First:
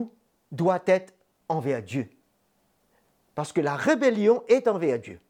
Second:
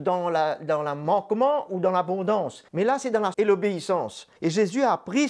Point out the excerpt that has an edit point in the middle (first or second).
second